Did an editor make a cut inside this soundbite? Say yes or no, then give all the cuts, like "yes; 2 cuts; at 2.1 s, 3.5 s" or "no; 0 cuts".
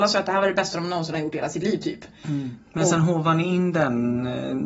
no; 0 cuts